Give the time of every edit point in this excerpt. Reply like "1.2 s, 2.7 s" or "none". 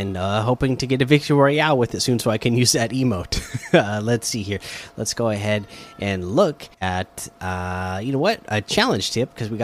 6.7 s